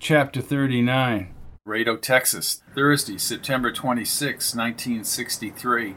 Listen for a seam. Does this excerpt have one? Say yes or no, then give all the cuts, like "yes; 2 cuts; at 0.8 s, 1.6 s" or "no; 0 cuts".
yes; 2 cuts; at 1.6 s, 2.7 s